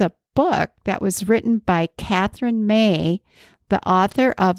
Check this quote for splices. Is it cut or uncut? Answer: uncut